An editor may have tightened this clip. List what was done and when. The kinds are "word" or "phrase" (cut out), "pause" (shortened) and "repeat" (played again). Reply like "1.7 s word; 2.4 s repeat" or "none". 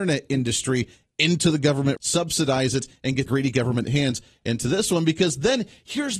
2.0 s word; 3.3 s word